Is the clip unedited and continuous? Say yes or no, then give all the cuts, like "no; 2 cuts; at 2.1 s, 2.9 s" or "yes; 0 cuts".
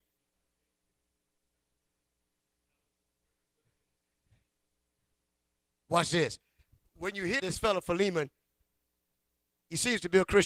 no; 1 cut; at 7.4 s